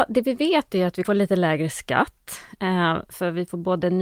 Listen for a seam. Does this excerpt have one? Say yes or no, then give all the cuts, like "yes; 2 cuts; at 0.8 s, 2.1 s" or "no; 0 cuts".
yes; 1 cut; at 1.0 s